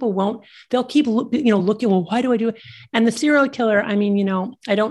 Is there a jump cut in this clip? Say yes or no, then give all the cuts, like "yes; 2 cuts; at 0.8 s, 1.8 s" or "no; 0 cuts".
no; 0 cuts